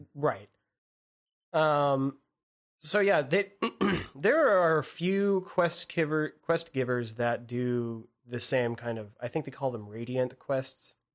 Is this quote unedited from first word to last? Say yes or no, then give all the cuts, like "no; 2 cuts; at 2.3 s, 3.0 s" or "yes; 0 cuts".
yes; 0 cuts